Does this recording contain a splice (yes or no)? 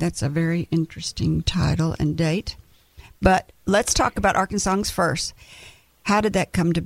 no